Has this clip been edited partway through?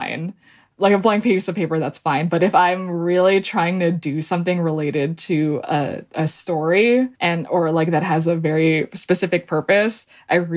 yes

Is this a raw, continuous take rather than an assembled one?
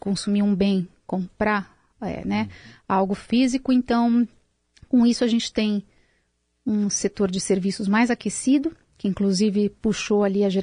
yes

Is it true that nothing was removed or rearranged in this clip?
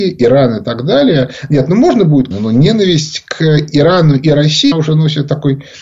no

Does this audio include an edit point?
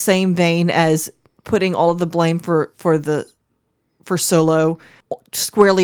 no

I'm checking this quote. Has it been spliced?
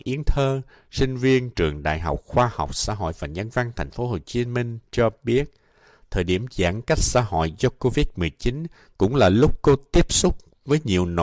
no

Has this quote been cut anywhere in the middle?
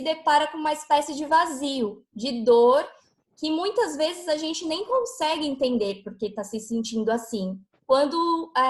no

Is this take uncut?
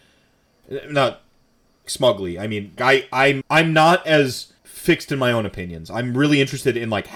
no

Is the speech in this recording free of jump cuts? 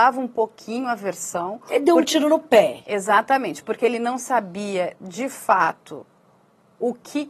yes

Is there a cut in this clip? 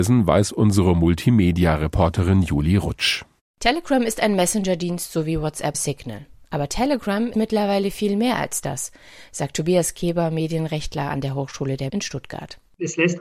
yes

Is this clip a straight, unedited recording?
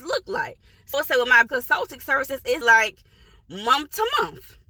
no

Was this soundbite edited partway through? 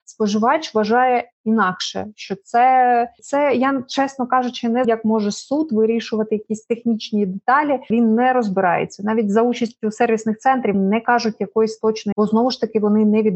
yes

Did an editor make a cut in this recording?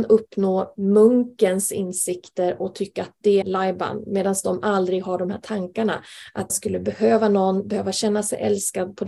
yes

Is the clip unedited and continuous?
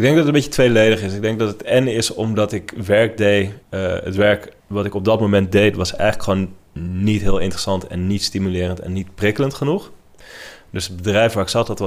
no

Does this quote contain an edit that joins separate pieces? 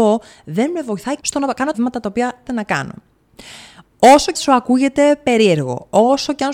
yes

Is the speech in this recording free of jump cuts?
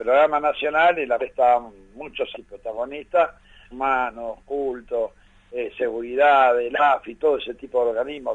no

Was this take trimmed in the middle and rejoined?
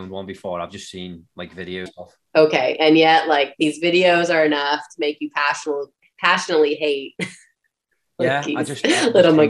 yes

